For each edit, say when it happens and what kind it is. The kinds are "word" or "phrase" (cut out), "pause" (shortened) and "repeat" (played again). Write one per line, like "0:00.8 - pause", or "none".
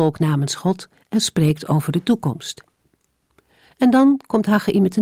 none